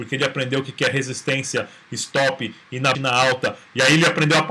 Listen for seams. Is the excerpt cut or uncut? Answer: cut